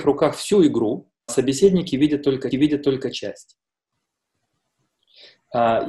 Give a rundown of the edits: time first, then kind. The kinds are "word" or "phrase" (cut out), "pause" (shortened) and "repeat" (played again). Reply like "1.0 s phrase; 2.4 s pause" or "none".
1.3 s word; 2.5 s repeat